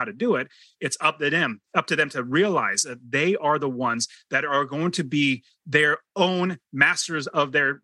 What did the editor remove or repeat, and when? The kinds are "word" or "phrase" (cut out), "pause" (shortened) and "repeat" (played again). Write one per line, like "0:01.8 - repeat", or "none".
0:01.6 - pause